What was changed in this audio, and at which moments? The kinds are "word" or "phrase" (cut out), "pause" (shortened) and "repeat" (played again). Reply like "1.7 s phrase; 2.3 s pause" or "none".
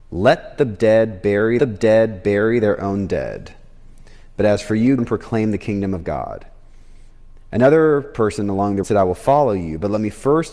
1.6 s repeat; 5.0 s word; 8.8 s word